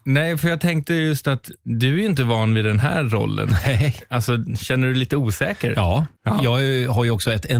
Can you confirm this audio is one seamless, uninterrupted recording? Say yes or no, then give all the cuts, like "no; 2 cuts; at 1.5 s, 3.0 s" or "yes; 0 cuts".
no; 1 cut; at 6.2 s